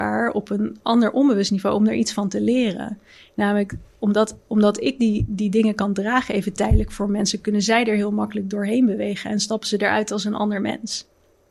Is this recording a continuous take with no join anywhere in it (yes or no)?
yes